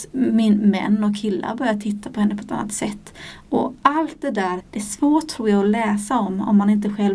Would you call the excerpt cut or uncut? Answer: cut